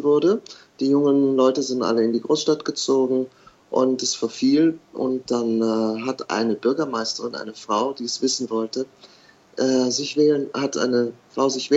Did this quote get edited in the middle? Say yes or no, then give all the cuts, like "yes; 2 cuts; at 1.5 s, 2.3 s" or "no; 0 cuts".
no; 0 cuts